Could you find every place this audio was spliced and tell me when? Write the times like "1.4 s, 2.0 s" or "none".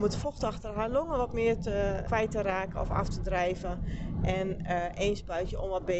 2.0 s